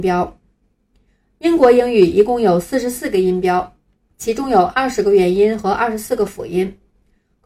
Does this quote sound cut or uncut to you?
uncut